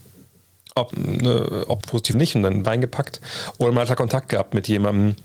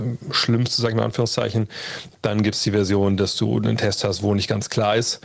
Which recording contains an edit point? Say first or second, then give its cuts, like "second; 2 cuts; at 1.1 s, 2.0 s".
first; 4 cuts; at 0.9 s, 1.8 s, 2.1 s, 2.6 s